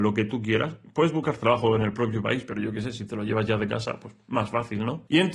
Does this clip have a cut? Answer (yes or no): no